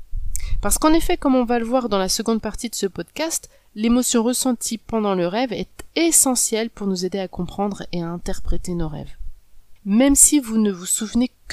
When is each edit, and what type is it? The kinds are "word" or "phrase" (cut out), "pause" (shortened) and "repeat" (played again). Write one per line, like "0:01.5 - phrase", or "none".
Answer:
0:09.8 - pause